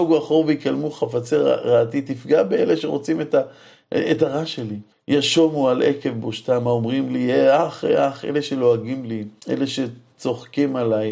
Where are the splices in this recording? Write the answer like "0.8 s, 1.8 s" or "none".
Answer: 4.9 s, 9.4 s